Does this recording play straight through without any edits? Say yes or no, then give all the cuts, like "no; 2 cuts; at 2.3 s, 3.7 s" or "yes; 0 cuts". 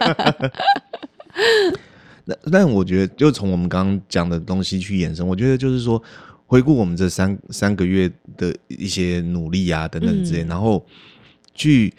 yes; 0 cuts